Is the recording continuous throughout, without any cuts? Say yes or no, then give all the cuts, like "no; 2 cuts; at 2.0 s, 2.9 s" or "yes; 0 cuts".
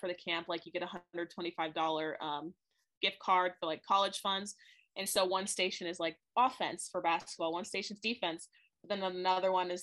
yes; 0 cuts